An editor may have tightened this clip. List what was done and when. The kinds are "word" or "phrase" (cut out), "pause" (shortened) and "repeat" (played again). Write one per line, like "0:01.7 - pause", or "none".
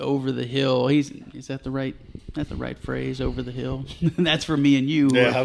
0:02.5 - word